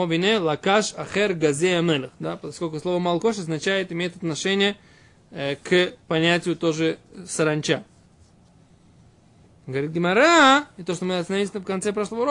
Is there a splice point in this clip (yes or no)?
no